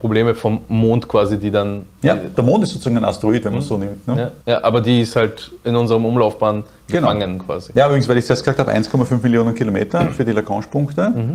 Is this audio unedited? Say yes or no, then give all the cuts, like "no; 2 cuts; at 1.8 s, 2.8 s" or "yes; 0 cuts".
no; 2 cuts; at 2.3 s, 4.4 s